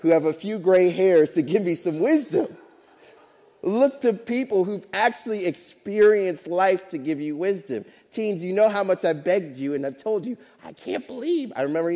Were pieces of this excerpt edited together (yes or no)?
no